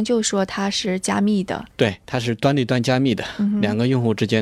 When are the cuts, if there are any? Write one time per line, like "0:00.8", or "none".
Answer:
0:01.7

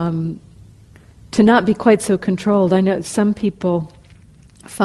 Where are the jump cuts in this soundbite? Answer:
none

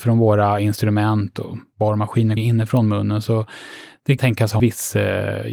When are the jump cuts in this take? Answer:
0:02.4
0:04.2
0:04.6

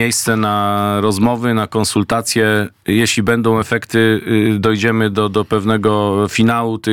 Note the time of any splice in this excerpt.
none

